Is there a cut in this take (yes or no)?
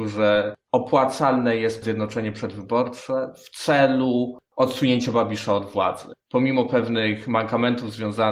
yes